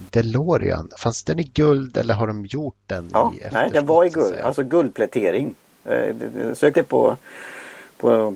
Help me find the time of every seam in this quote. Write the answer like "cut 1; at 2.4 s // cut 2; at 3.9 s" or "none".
cut 1; at 1.0 s // cut 2; at 6.7 s